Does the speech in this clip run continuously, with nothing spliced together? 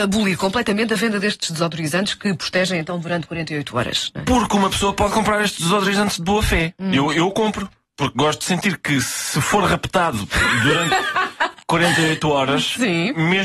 yes; 0 cuts

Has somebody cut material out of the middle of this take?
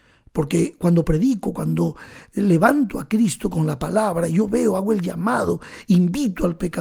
no; 0 cuts

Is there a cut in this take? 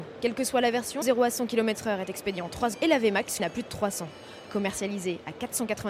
yes; 3 cuts; at 1.0 s, 2.7 s, 3.4 s

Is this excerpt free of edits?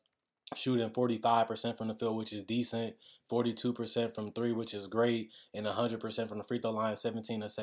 yes; 0 cuts

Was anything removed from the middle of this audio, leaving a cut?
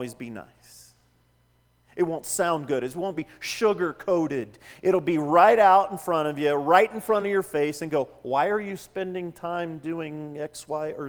no; 0 cuts

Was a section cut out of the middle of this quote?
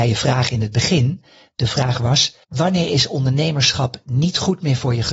yes; 1 cut; at 2.4 s

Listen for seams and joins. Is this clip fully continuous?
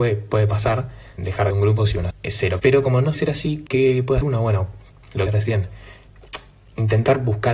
no; 8 cuts; at 1.2 s, 1.5 s, 2.1 s, 2.6 s, 3.1 s, 3.7 s, 4.2 s, 5.3 s

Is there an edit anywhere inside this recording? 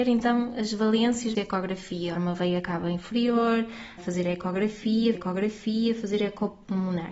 yes; 4 cuts; at 1.3 s, 2.1 s, 4.0 s, 5.1 s

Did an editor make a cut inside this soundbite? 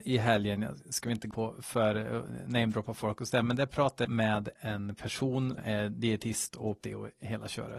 yes; 5 cuts; at 1.3 s, 4.0 s, 4.6 s, 5.6 s, 6.8 s

